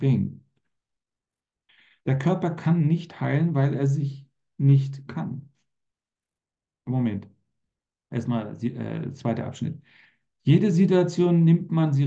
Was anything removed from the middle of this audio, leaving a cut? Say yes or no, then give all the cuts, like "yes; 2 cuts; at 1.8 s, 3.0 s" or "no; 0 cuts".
yes; 1 cut; at 5.1 s